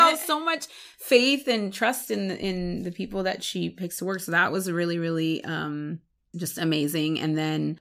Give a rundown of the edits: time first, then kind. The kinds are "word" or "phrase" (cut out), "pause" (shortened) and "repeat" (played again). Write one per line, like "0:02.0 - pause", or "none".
none